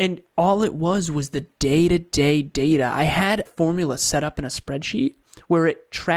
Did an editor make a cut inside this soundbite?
yes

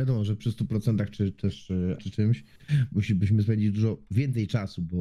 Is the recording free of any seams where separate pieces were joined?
no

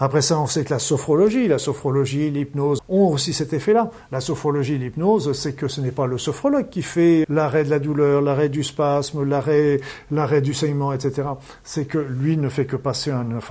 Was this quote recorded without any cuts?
no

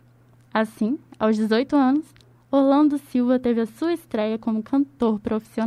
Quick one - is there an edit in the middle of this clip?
no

